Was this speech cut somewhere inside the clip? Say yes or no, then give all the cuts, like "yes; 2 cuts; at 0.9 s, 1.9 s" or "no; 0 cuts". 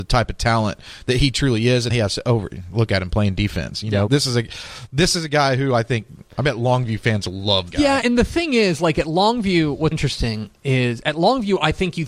yes; 5 cuts; at 1.9 s, 4.1 s, 7.7 s, 8.0 s, 9.9 s